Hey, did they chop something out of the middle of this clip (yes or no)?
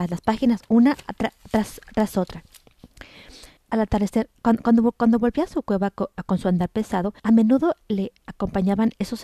yes